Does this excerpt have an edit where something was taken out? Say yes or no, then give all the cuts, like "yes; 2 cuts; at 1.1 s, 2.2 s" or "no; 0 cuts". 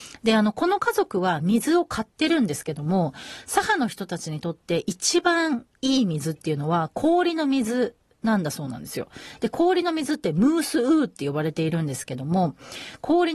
no; 0 cuts